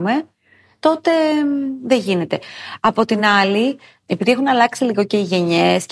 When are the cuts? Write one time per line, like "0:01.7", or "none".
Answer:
none